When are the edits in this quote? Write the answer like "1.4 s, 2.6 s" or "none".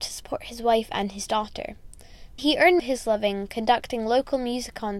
2.4 s, 2.8 s